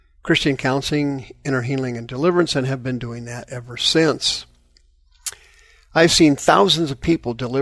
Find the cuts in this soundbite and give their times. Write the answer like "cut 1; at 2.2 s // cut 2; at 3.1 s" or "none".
none